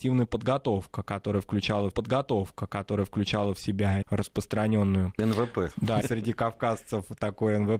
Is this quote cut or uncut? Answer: cut